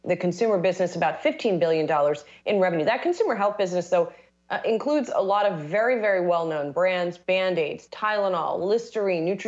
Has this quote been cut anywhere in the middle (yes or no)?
no